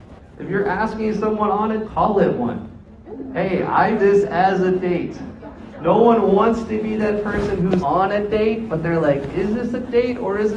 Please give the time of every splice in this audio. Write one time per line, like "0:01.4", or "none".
0:01.8
0:04.0
0:07.8